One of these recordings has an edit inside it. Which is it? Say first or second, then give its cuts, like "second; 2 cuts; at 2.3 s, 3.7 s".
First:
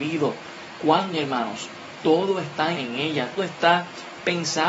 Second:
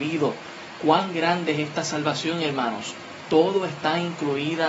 first; 3 cuts; at 1.1 s, 2.7 s, 3.4 s